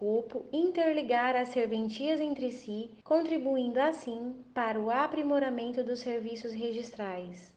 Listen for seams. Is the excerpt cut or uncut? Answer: cut